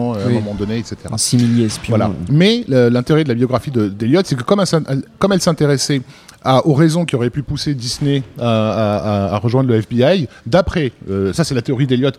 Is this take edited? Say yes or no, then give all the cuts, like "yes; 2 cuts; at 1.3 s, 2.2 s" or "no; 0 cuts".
no; 0 cuts